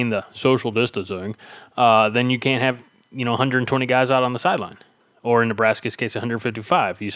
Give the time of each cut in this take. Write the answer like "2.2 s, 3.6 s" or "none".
none

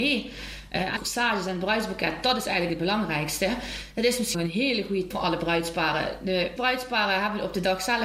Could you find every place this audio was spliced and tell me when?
1.0 s, 4.3 s, 5.1 s, 6.6 s

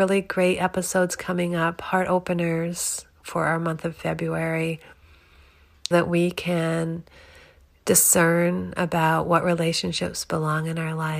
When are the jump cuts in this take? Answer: 5.9 s

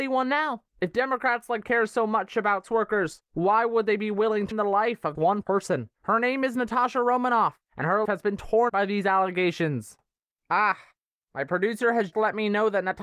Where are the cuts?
1.6 s, 2.6 s, 4.5 s, 5.1 s, 8.0 s, 8.7 s, 12.1 s

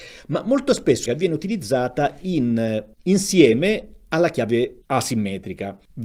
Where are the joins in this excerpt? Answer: 1.1 s, 2.9 s

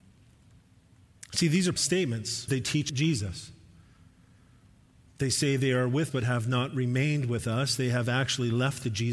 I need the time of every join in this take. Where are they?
1.8 s, 2.5 s, 2.9 s, 6.1 s

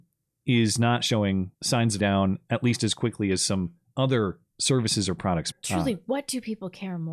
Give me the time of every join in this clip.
1.5 s, 2.0 s, 4.5 s, 5.5 s

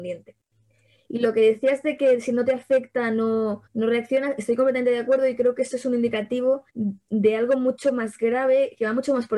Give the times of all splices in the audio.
3.7 s, 6.7 s

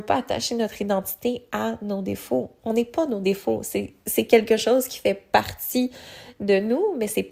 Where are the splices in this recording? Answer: none

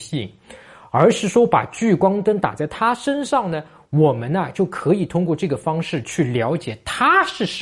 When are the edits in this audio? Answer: none

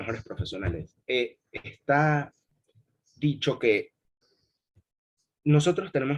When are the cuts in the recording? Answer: none

